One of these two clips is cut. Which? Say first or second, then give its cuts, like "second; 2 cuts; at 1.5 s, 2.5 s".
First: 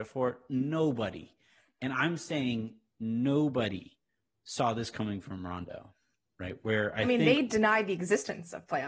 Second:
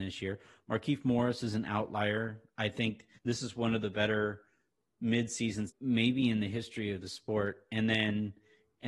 second; 2 cuts; at 3.2 s, 5.7 s